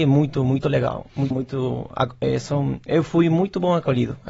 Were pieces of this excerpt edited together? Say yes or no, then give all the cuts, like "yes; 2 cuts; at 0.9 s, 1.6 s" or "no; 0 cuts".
yes; 1 cut; at 1.3 s